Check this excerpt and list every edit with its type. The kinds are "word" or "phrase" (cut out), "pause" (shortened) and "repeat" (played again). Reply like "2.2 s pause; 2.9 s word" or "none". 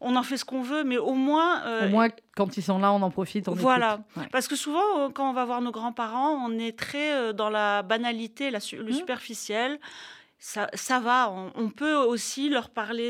none